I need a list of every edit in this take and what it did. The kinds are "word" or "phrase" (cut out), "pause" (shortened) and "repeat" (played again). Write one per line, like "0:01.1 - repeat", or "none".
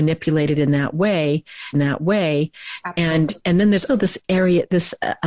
0:01.7 - repeat
0:03.4 - pause
0:03.9 - word